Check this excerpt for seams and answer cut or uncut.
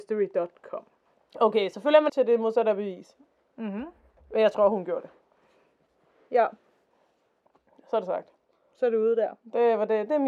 cut